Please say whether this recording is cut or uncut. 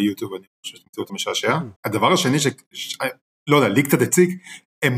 cut